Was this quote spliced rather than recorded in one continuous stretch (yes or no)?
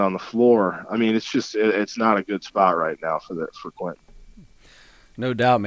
no